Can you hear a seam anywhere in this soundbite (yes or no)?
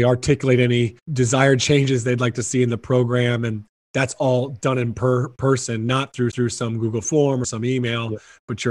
yes